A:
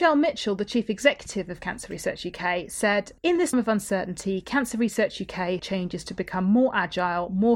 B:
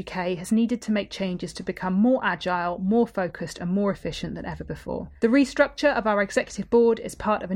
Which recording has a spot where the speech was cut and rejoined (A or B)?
A